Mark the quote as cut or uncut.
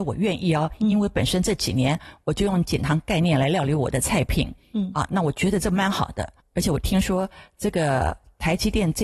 uncut